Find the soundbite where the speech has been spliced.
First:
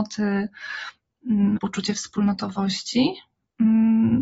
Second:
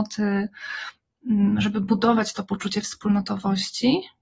first; 1 cut; at 1.6 s

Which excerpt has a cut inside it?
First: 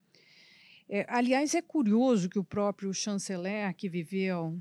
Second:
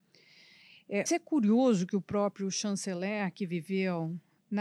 second; 1 cut; at 1.1 s

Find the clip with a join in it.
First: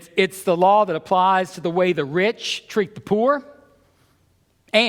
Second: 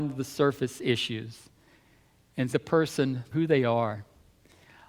second; 2 cuts; at 2.5 s, 3.3 s

